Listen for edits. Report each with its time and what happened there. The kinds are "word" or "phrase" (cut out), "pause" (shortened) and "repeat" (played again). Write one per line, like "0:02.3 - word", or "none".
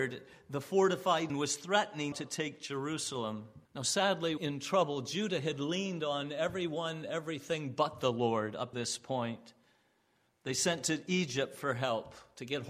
0:01.3 - phrase
0:02.1 - word
0:03.6 - pause
0:04.4 - word
0:07.0 - word
0:08.7 - word